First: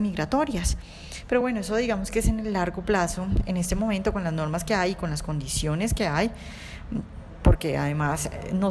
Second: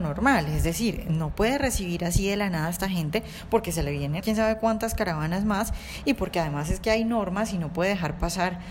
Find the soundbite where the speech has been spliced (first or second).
second